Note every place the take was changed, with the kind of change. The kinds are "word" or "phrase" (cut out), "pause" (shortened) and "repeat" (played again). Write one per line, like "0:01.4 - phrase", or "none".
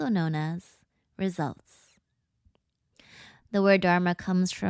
none

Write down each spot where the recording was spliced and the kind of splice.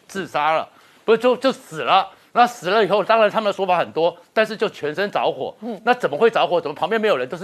none

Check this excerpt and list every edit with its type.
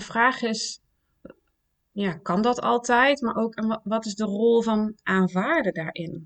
none

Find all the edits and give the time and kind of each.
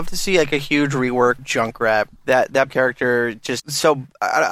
0:01.4 - word
0:02.7 - word
0:03.6 - word

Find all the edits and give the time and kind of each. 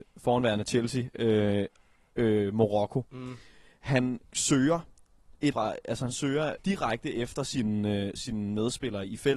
0:02.1 - word
0:04.2 - word
0:05.5 - word
0:06.6 - word

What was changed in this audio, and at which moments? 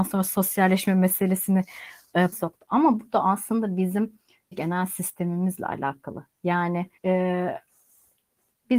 0:02.3 - word
0:04.5 - word
0:07.0 - pause

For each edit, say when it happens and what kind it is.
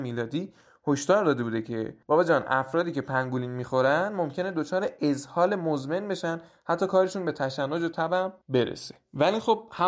0:02.0 - pause
0:08.4 - pause

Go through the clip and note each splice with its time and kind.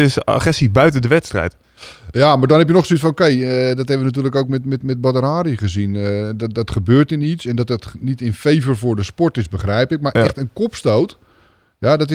none

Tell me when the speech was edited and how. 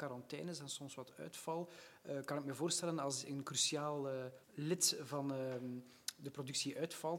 0:04.4 - pause

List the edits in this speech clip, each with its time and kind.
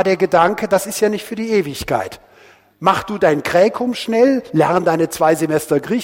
none

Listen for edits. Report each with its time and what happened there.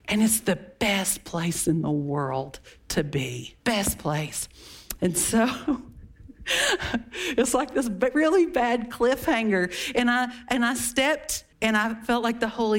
0:03.6 - pause
0:11.5 - pause

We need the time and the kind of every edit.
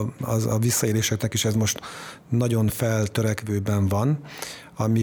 none

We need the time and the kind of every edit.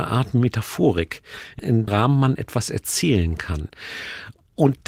0:01.9 - word

